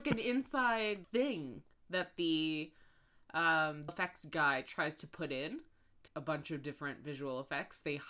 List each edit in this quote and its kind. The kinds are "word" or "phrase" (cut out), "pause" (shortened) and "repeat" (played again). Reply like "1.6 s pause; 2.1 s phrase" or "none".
1.0 s word; 3.9 s phrase; 6.1 s word